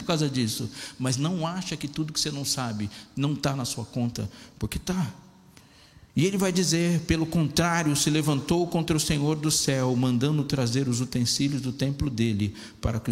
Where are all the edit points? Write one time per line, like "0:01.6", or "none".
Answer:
0:06.1